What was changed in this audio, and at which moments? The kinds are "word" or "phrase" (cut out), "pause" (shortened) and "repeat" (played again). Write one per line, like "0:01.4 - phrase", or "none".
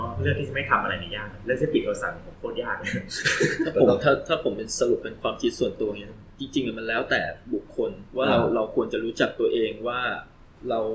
0:08.1 - pause